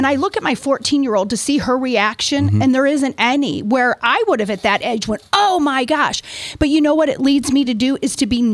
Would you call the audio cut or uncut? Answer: uncut